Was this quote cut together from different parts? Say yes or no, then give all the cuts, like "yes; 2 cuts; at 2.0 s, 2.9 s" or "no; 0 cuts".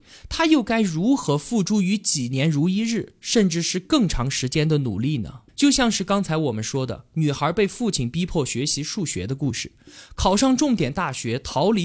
yes; 1 cut; at 5.5 s